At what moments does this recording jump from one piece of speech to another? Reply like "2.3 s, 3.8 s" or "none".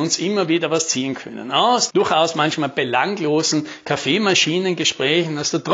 1.9 s